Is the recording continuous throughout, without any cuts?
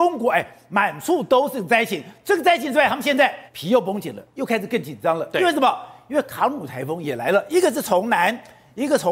no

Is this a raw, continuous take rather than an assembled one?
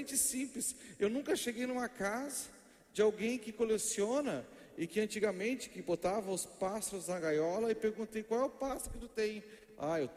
yes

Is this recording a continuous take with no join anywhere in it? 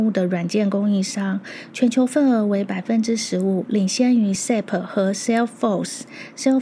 yes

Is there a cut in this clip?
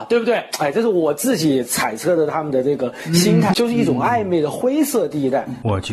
yes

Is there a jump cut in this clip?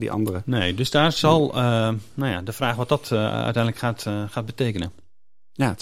no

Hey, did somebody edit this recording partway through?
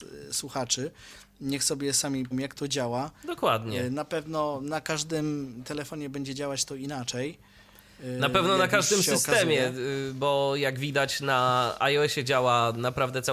yes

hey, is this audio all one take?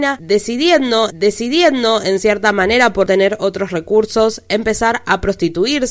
no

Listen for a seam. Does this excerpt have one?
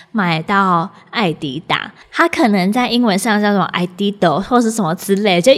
no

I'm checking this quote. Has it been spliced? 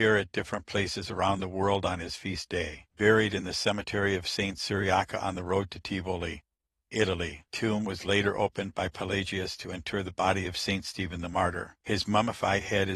no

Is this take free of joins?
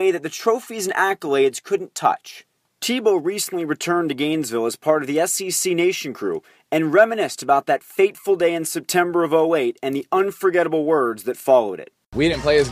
yes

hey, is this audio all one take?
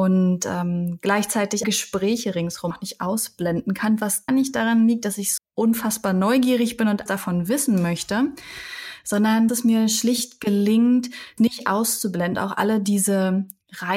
no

